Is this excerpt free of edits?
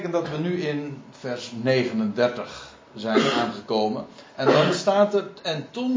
yes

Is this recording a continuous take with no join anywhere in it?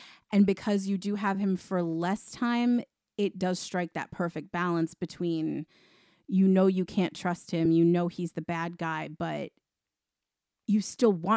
yes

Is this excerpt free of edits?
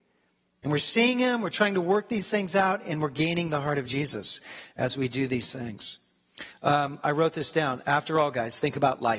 yes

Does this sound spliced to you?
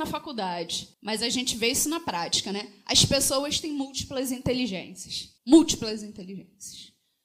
yes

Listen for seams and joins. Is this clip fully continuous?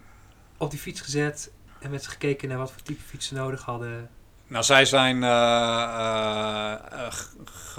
yes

